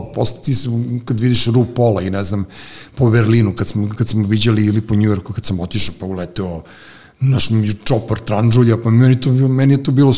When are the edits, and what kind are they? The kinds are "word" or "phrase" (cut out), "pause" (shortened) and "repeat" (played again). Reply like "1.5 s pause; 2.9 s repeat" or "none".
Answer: none